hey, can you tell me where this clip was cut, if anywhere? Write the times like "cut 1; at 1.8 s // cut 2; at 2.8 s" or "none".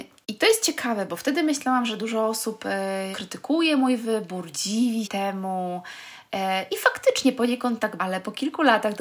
cut 1; at 3.1 s // cut 2; at 5.0 s // cut 3; at 8.0 s